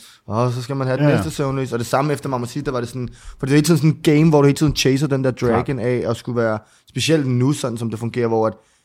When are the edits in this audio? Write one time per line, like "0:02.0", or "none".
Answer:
none